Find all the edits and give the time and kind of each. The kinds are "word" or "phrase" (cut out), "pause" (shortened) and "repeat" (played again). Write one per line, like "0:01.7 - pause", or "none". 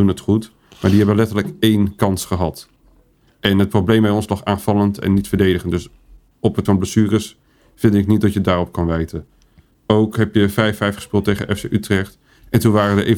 0:06.6 - word